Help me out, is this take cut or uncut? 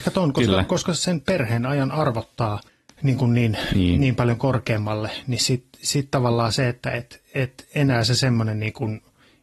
cut